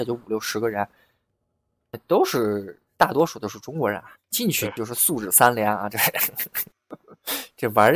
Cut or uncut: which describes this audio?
cut